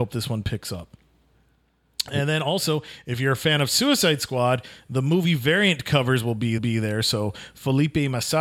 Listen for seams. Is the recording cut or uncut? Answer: cut